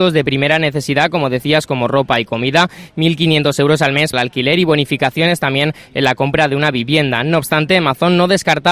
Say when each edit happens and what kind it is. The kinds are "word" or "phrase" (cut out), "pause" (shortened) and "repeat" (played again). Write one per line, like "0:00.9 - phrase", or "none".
0:04.1 - word